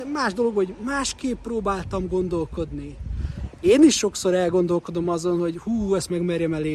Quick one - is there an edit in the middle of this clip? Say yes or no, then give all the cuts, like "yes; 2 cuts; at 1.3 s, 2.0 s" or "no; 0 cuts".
no; 0 cuts